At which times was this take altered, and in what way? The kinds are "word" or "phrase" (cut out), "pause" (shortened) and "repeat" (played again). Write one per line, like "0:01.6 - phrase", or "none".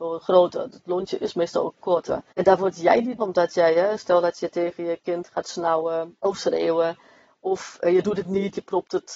0:02.3 - pause
0:03.2 - phrase
0:06.2 - pause